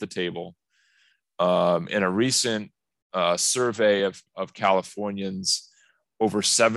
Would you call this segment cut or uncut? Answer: uncut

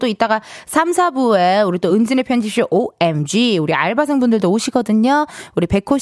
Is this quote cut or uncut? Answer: uncut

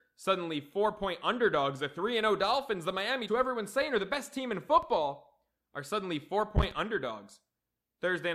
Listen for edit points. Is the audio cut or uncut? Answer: cut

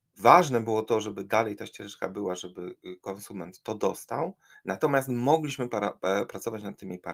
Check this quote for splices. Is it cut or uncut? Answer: cut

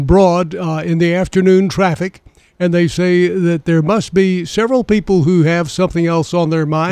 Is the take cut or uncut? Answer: uncut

